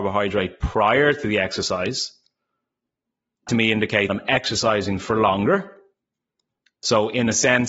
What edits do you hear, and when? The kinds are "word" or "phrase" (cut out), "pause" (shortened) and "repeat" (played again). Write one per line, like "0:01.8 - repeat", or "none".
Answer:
0:03.5 - word
0:04.1 - word